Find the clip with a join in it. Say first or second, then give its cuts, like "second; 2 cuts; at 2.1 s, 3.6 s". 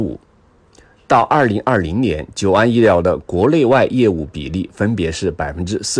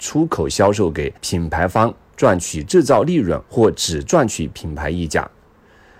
second; 2 cuts; at 1.2 s, 3.4 s